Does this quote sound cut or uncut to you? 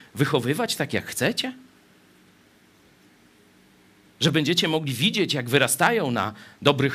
uncut